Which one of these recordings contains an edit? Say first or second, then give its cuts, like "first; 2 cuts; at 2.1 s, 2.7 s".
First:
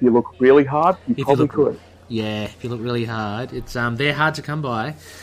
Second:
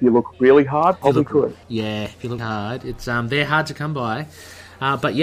second; 3 cuts; at 1.0 s, 1.6 s, 2.4 s